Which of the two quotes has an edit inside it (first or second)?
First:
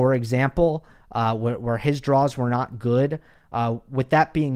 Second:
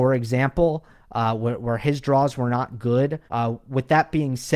second